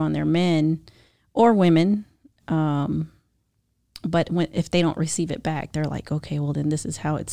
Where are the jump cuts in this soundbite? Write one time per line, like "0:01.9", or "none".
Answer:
none